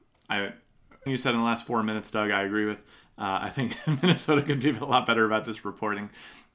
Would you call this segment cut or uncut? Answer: cut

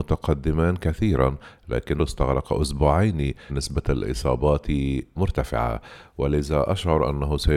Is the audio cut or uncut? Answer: cut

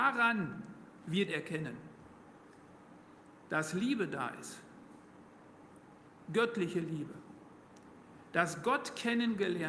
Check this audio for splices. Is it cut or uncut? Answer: cut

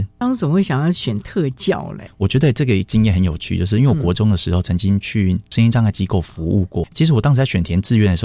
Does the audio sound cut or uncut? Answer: uncut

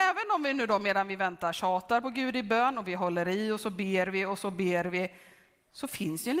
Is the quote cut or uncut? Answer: uncut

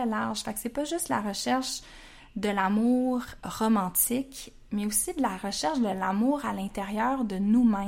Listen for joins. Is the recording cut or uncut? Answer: uncut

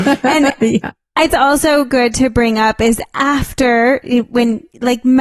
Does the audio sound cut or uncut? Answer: cut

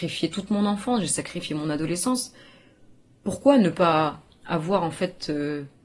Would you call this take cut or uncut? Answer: uncut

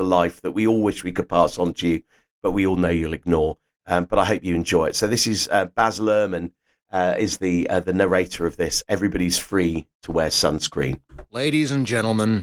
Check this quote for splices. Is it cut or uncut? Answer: uncut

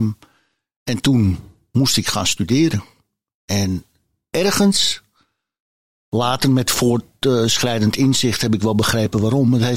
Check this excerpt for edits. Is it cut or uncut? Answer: uncut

